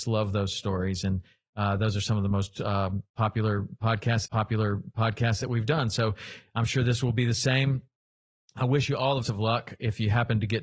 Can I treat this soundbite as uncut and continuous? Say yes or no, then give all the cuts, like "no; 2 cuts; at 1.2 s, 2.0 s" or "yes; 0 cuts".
no; 2 cuts; at 4.3 s, 9.2 s